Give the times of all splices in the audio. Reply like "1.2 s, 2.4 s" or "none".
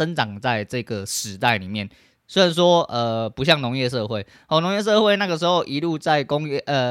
none